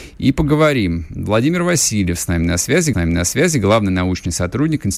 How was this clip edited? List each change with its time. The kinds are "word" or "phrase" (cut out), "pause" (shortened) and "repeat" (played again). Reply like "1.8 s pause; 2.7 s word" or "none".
2.9 s repeat

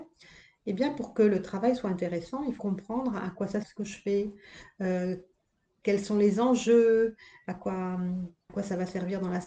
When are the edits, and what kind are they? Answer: 2.6 s word; 3.6 s word; 8.5 s word

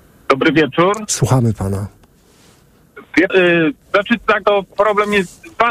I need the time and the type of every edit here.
3.3 s word; 3.8 s pause; 4.4 s word

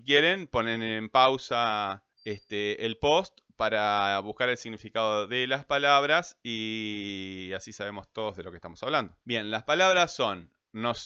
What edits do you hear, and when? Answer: 2.1 s pause; 9.2 s pause

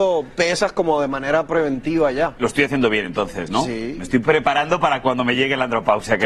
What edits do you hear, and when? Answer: none

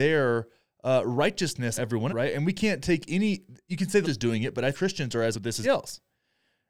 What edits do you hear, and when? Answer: 1.8 s word; 2.1 s word; 3.7 s word; 4.0 s word; 4.7 s word; 5.3 s word; 5.6 s word

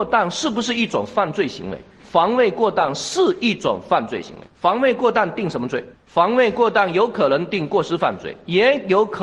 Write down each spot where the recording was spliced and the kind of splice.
1.9 s pause; 4.5 s pause; 5.9 s pause

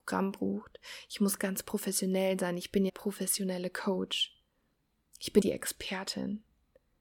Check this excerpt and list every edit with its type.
1.4 s word; 2.9 s phrase; 4.9 s pause; 5.4 s word

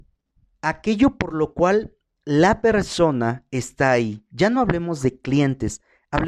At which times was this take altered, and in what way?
none

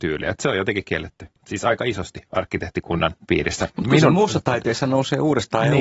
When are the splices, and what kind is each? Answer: 1.4 s pause; 3.2 s pause

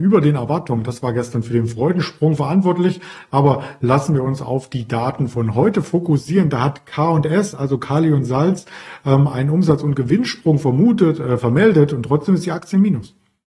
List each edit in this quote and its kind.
none

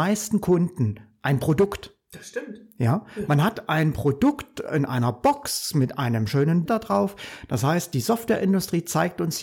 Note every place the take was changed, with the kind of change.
6.7 s word

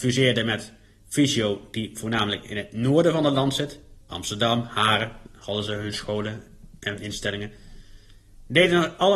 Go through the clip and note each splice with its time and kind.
4.0 s pause; 6.8 s pause

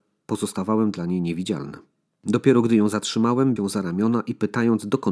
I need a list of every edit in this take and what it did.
3.6 s word

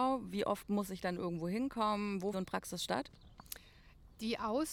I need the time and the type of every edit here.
2.3 s phrase

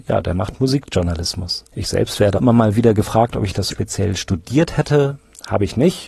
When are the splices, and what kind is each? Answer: 1.7 s pause; 2.3 s word; 3.7 s word

